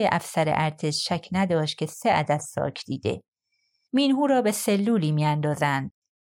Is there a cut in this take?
no; 0 cuts

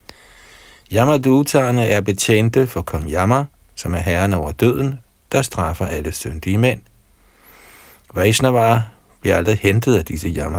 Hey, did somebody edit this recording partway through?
no; 0 cuts

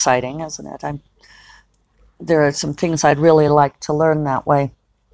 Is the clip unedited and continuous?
yes; 0 cuts

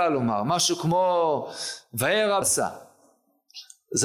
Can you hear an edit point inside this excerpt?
yes; 1 cut; at 2.4 s

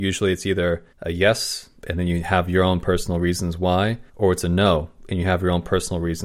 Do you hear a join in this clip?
yes; 3 cuts; at 0.9 s, 1.8 s, 4.1 s

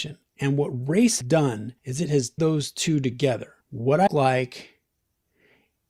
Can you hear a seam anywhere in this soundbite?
yes; 5 cuts; at 1.2 s, 1.8 s, 2.4 s, 3.6 s, 4.1 s

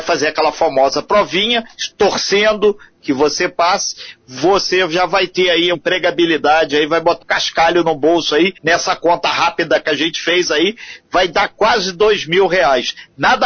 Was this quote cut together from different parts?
yes; 3 cuts; at 5.7 s, 7.2 s, 8.6 s

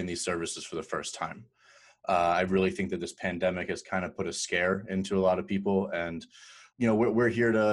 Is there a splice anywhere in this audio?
no; 0 cuts

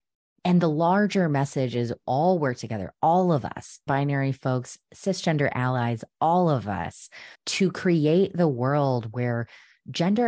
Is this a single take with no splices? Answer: no; 3 cuts; at 2.0 s, 3.9 s, 7.3 s

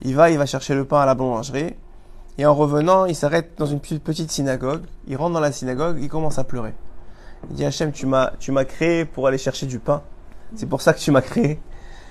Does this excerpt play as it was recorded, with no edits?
yes; 0 cuts

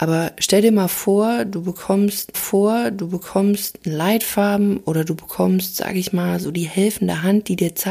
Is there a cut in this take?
yes; 1 cut; at 2.3 s

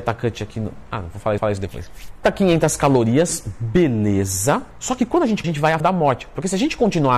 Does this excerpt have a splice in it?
yes; 4 cuts; at 1.4 s, 2.2 s, 5.4 s, 5.8 s

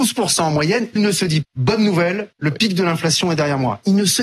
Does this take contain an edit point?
yes; 3 cuts; at 1.0 s, 1.4 s, 2.3 s

